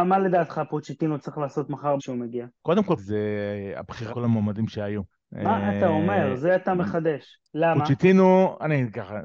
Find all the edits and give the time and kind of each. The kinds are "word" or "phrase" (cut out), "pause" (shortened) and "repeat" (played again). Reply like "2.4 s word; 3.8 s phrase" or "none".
2.0 s word; 2.6 s pause; 3.0 s phrase; 4.1 s phrase; 5.1 s pause; 7.4 s pause